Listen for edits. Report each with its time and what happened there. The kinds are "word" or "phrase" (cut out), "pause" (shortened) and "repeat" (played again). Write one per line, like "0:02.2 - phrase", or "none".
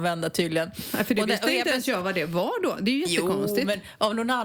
none